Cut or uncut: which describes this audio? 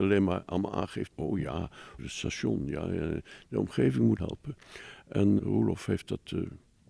cut